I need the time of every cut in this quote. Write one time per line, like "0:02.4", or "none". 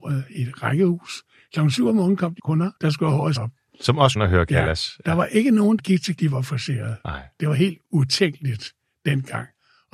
0:02.4
0:02.8
0:03.4
0:04.2
0:05.8
0:06.2